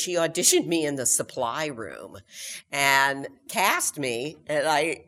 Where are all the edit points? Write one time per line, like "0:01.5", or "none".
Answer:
none